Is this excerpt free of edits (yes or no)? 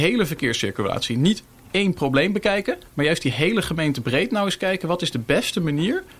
yes